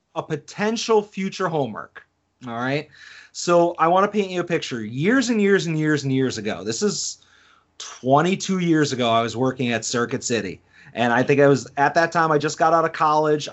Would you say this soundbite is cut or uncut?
uncut